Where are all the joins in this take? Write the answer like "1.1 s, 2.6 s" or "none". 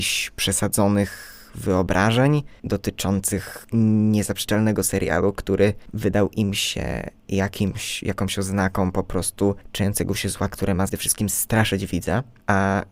4.8 s, 10.9 s